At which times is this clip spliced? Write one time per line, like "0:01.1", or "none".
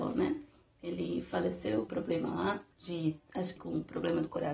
0:01.9
0:02.7
0:03.6